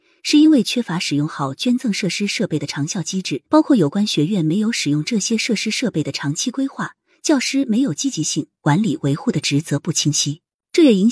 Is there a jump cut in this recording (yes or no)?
yes